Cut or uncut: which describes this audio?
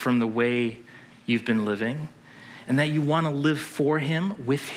uncut